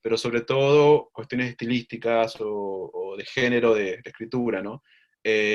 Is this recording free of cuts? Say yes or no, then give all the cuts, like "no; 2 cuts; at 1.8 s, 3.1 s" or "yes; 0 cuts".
yes; 0 cuts